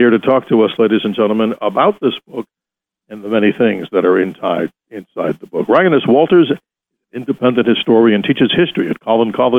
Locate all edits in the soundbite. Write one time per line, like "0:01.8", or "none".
none

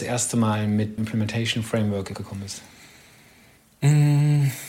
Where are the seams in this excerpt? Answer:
0:01.0
0:02.1

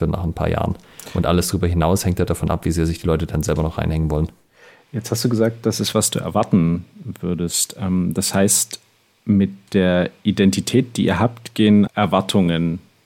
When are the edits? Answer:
0:05.9
0:11.9

